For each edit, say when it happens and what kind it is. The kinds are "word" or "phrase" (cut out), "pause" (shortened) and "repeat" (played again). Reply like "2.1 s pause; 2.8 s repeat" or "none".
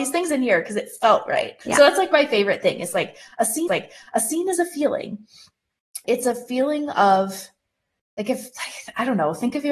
1.6 s pause; 3.7 s repeat; 6.0 s word

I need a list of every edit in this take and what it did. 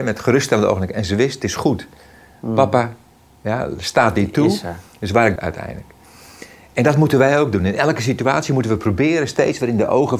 5.4 s phrase

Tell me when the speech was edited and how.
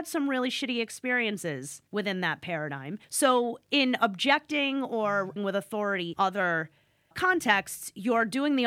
1.9 s pause; 3.0 s pause; 5.4 s word; 6.1 s word; 7.1 s word

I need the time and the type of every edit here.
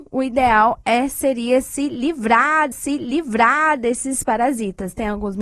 2.7 s repeat

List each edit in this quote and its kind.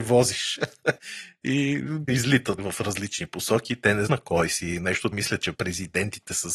2.1 s word; 2.6 s word; 4.1 s word; 5.1 s word; 5.5 s word

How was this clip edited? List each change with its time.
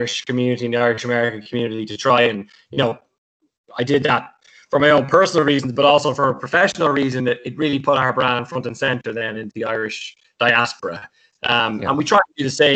none

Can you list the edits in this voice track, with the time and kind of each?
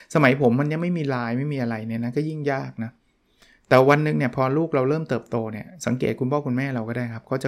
none

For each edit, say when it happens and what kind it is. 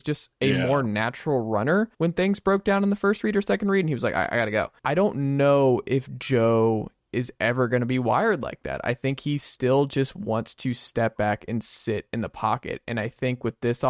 1.9 s pause; 4.8 s pause

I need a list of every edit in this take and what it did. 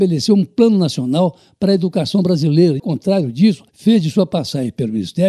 2.8 s phrase; 3.7 s pause

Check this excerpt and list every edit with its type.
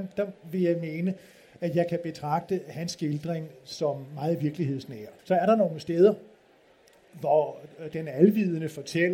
5.2 s pause

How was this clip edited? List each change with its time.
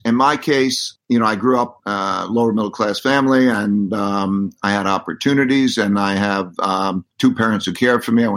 1.8 s word; 7.1 s pause

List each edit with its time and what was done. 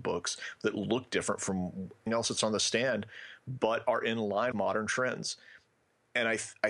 2.1 s word; 4.5 s word

